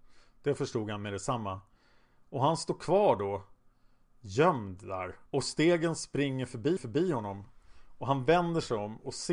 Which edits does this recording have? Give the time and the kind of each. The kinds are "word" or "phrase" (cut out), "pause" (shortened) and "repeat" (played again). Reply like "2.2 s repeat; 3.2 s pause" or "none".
5.3 s pause; 6.8 s repeat